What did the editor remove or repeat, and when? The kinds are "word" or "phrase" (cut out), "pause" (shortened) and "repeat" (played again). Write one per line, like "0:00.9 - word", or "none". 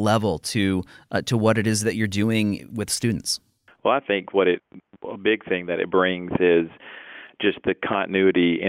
none